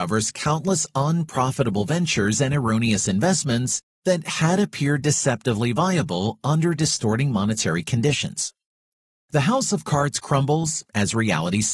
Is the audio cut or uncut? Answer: uncut